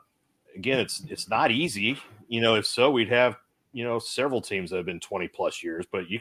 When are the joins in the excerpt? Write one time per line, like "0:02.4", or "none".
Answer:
none